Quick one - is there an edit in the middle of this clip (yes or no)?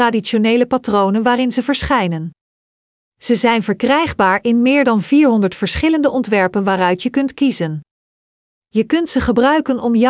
no